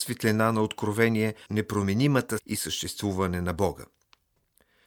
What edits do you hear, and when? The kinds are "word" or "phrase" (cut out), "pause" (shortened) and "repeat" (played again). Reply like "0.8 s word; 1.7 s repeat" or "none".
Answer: 1.5 s word; 2.4 s word